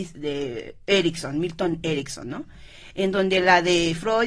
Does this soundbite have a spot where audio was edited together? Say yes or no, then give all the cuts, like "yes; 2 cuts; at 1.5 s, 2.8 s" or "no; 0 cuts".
no; 0 cuts